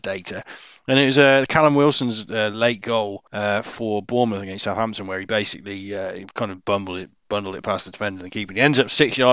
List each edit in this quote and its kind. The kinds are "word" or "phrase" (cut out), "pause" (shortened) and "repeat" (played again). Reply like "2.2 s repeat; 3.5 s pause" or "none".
3.3 s pause